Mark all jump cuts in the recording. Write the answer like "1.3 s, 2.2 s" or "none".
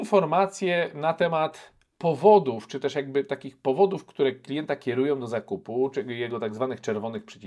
none